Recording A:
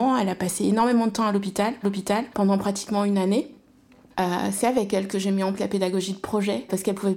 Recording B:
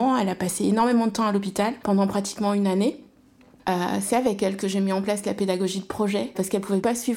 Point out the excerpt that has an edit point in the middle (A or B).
A